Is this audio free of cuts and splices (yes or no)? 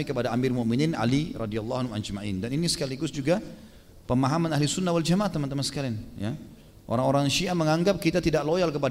yes